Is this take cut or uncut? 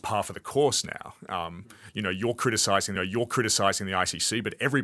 cut